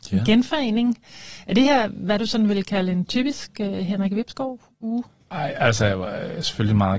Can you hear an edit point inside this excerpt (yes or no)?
no